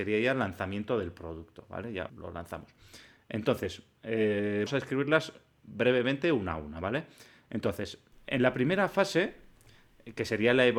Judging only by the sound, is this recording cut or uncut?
cut